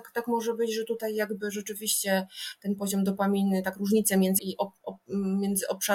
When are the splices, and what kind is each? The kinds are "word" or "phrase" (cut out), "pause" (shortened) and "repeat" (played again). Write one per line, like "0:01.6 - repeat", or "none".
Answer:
0:04.4 - phrase